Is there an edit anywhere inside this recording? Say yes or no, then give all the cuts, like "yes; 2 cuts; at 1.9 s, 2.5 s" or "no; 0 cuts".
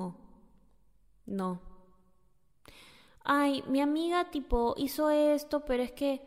no; 0 cuts